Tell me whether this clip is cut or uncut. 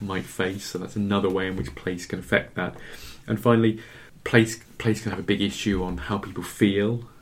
uncut